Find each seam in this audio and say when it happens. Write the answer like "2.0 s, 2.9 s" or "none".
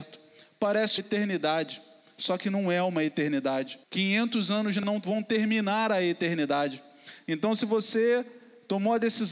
1.0 s, 3.8 s, 4.8 s

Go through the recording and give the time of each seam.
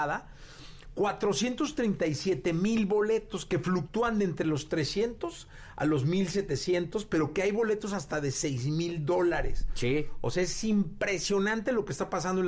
none

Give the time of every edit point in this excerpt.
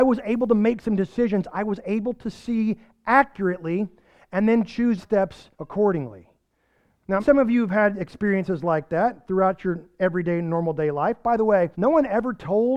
5.0 s, 5.5 s, 7.2 s, 11.7 s

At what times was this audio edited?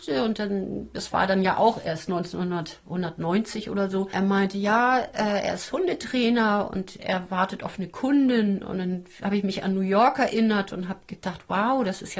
none

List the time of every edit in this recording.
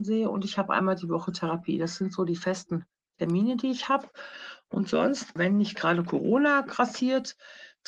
5.4 s

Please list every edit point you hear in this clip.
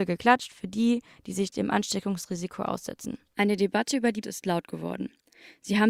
1.5 s, 4.2 s

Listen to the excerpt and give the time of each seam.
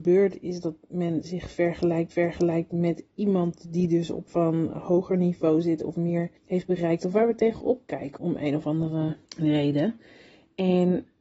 2.1 s, 4.3 s, 6.4 s, 8.2 s, 9.2 s

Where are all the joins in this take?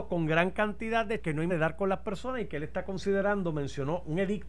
1.2 s, 1.5 s

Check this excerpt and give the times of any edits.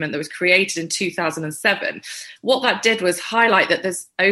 none

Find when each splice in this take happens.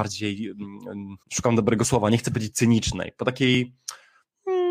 1.2 s

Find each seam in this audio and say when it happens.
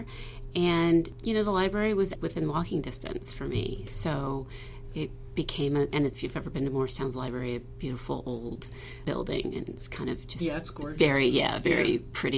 2.2 s, 6.1 s

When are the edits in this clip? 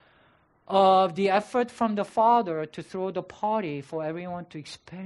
none

